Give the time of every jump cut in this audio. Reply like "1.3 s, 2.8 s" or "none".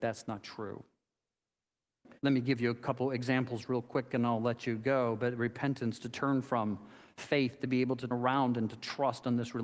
2.2 s, 8.1 s